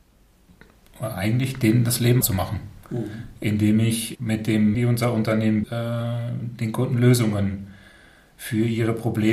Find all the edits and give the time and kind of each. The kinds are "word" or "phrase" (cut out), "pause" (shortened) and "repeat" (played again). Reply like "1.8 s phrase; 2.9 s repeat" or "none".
2.2 s word; 4.1 s word; 4.7 s word; 5.6 s word